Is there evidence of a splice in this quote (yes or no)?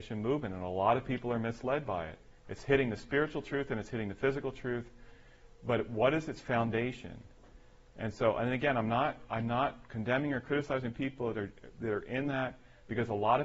yes